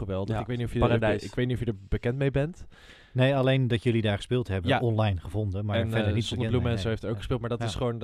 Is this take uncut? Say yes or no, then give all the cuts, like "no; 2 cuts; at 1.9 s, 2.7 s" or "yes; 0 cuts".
yes; 0 cuts